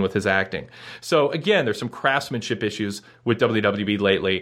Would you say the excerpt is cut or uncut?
uncut